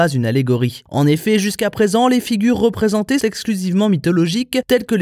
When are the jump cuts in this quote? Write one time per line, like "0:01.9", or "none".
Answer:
0:03.2